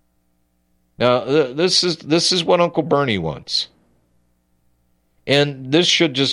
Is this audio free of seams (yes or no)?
yes